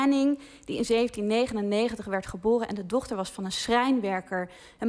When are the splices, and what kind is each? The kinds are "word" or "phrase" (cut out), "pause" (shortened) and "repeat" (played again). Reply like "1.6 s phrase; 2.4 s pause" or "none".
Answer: none